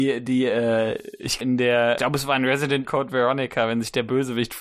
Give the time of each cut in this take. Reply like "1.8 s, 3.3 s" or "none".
1.4 s, 2.0 s, 2.8 s